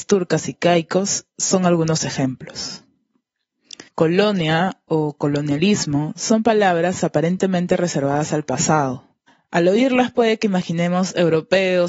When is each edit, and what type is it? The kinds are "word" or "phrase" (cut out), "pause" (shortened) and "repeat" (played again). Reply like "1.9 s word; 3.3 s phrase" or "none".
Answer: 3.9 s pause; 9.3 s pause

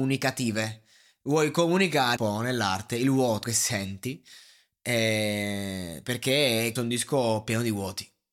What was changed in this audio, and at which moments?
2.2 s word; 3.4 s word; 6.8 s word

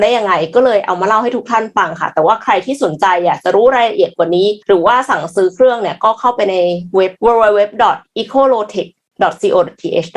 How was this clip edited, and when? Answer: 4.6 s pause; 7.2 s pause

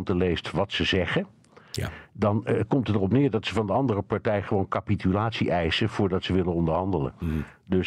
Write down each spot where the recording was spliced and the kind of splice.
none

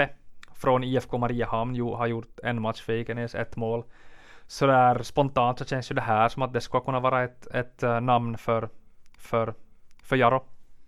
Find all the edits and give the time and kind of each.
9.2 s repeat

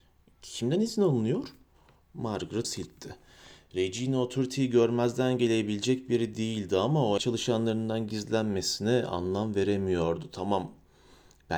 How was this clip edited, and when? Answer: 2.6 s word; 7.2 s phrase

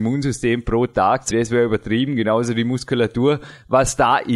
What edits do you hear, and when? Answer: 1.3 s word

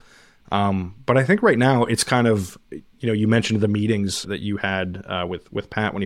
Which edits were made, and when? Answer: 4.2 s phrase

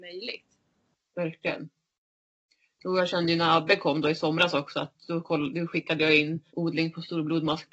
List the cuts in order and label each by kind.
6.5 s pause

